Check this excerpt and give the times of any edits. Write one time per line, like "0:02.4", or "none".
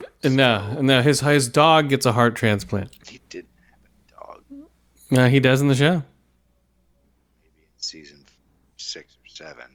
0:03.0